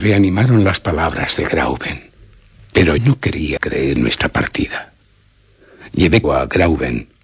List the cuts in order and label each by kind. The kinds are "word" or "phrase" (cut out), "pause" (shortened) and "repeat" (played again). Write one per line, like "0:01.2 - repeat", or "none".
0:03.0 - word
0:03.6 - word
0:04.0 - word
0:06.2 - word